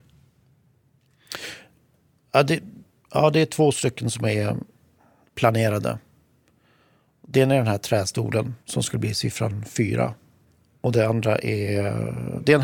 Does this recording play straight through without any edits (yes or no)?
no